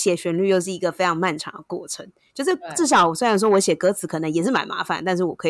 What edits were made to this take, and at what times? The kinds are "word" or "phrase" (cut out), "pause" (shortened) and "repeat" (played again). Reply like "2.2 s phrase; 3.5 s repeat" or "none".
none